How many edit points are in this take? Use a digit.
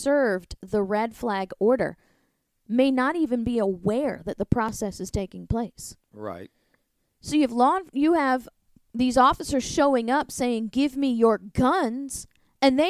0